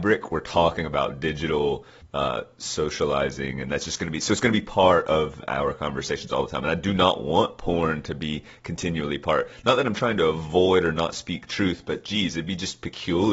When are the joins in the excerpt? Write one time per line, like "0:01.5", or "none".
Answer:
0:02.0